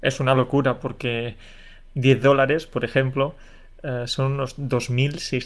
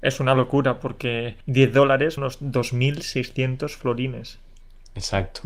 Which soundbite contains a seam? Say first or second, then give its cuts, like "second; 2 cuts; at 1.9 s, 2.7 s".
second; 2 cuts; at 1.4 s, 2.2 s